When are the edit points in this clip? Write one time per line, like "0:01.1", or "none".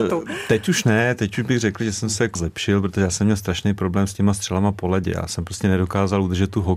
0:02.4